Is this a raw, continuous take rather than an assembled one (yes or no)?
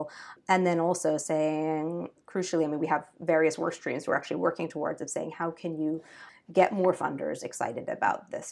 yes